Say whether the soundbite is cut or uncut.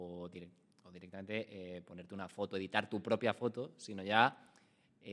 uncut